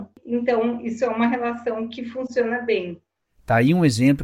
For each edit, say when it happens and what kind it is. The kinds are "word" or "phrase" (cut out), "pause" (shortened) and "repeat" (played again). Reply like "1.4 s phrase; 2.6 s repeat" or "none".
none